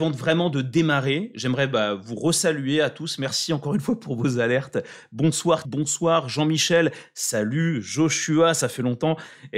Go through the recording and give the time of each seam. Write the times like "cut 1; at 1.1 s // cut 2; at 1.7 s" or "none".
cut 1; at 5.6 s